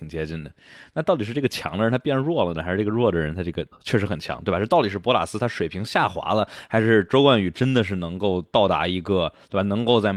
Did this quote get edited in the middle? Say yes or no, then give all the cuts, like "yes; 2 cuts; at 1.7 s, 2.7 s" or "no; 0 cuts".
yes; 1 cut; at 3.7 s